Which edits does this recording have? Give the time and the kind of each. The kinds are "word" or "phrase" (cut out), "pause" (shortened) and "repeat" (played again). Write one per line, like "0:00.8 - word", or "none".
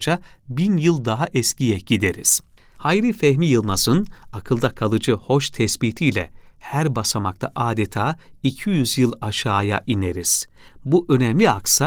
0:02.6 - pause